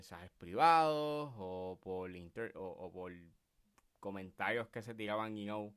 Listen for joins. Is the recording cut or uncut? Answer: uncut